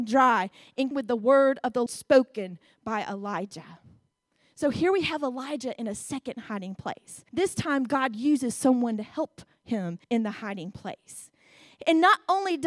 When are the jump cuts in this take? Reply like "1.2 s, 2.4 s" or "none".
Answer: 0.9 s, 1.9 s, 7.3 s, 10.0 s

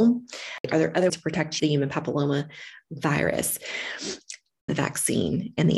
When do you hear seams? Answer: 1.1 s, 1.6 s, 4.7 s

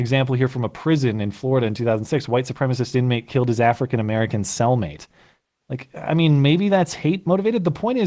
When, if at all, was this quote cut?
none

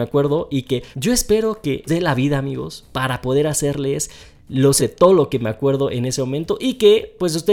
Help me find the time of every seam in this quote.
0.9 s, 1.9 s, 4.8 s

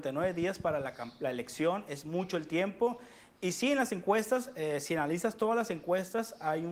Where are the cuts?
none

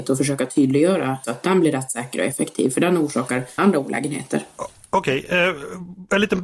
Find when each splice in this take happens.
1.2 s, 3.6 s

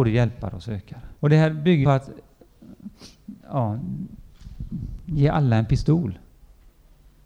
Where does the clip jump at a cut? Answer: 1.2 s, 1.8 s, 3.4 s

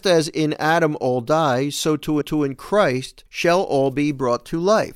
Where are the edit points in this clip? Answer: 2.2 s, 3.3 s

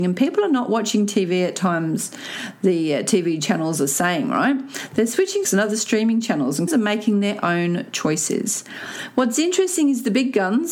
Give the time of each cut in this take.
5.4 s, 6.7 s

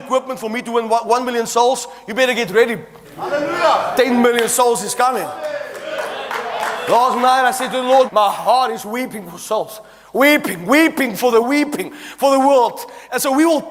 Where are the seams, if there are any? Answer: 3.0 s, 8.1 s, 11.4 s

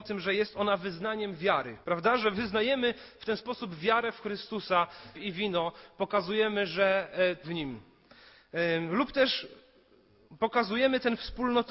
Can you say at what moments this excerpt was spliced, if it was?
1.8 s, 5.1 s, 7.4 s

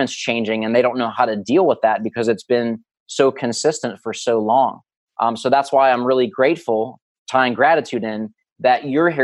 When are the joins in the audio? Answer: none

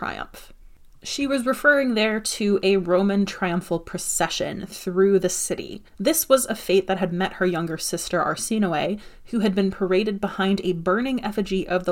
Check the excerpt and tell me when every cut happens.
5.9 s

